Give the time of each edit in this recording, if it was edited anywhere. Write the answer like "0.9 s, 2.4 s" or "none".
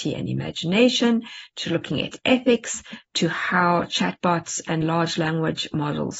none